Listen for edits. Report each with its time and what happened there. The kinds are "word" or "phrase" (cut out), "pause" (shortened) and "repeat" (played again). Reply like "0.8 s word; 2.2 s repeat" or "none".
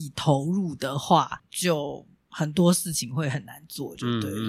1.4 s word